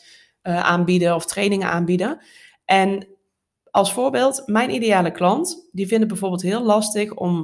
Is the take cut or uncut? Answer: uncut